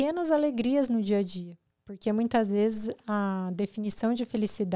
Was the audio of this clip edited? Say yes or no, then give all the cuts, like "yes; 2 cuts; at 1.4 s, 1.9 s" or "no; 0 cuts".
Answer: no; 0 cuts